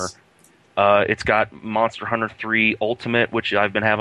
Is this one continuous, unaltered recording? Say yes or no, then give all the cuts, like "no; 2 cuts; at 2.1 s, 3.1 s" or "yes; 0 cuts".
yes; 0 cuts